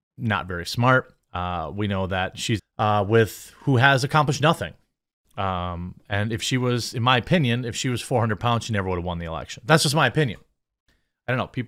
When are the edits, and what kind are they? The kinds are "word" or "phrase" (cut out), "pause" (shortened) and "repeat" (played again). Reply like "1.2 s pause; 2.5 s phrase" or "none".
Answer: 1.2 s pause; 2.6 s phrase

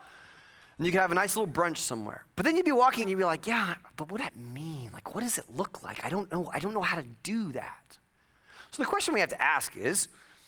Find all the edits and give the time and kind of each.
2.3 s pause; 3.0 s word; 4.2 s word

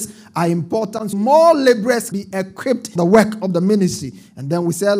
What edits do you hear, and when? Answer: 1.1 s word; 2.1 s word; 3.0 s word

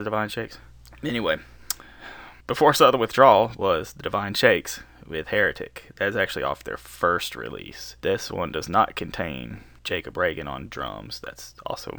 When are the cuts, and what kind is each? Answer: 2.4 s pause; 8.0 s pause

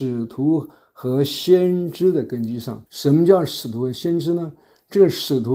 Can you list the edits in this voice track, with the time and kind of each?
2.9 s pause

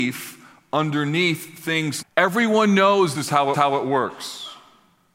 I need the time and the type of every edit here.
2.0 s word; 3.1 s word; 3.5 s repeat

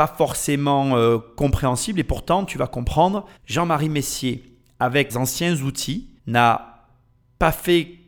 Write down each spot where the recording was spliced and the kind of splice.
3.4 s pause; 5.1 s word; 6.2 s pause

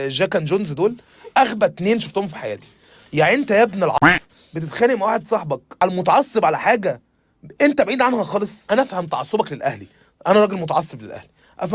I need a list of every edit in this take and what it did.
none

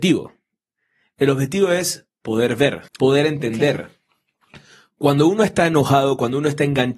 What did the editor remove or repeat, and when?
2.9 s pause

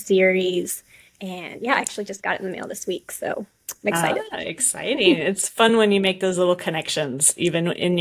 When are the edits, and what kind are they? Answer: none

